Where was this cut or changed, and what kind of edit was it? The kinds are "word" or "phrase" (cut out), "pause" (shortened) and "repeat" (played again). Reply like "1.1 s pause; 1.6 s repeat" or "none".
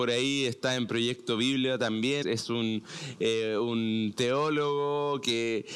2.2 s word